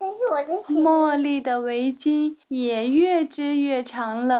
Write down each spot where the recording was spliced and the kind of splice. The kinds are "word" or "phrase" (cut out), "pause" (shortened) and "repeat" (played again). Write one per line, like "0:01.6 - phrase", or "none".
0:02.4 - pause